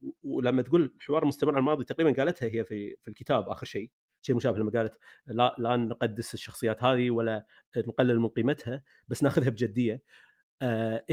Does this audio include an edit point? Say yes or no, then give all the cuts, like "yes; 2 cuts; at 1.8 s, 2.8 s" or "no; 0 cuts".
no; 0 cuts